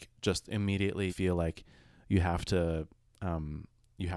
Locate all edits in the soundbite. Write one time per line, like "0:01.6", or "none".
0:01.1